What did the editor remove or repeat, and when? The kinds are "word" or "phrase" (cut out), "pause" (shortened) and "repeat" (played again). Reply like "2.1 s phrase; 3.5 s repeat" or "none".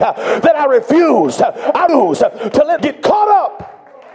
1.9 s word; 2.8 s word